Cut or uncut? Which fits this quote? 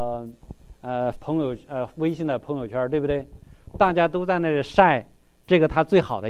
cut